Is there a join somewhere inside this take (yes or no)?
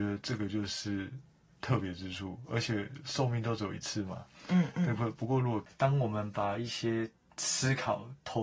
no